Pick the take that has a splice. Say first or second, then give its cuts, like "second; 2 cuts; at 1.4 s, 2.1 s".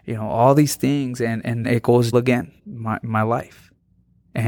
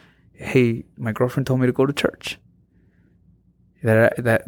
first; 3 cuts; at 1.6 s, 2.1 s, 2.6 s